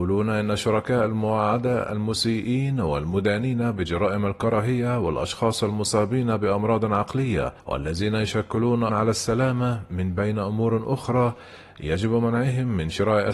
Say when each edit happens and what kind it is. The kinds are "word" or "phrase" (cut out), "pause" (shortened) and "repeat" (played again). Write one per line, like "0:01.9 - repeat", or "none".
0:07.6 - pause
0:08.9 - word